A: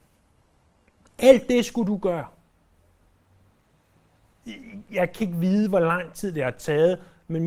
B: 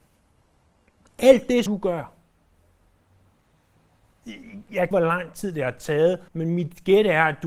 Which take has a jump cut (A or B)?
B